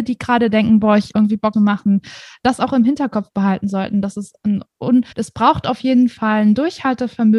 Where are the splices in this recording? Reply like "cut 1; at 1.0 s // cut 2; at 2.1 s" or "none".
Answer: cut 1; at 1.1 s // cut 2; at 1.5 s // cut 3; at 5.1 s